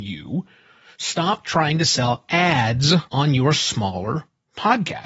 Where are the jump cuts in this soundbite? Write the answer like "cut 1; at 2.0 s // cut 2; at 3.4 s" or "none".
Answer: cut 1; at 3.1 s